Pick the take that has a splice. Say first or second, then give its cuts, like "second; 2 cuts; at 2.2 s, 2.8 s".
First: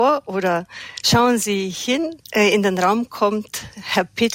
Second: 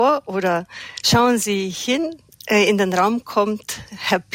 first; 1 cut; at 2.2 s